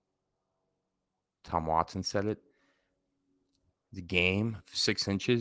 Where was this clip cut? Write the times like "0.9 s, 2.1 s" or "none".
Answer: none